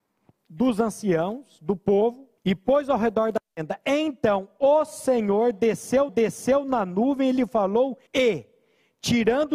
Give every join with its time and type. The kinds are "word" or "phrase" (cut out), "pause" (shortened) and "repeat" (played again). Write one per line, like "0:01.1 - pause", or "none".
0:02.4 - pause
0:06.1 - repeat
0:08.1 - pause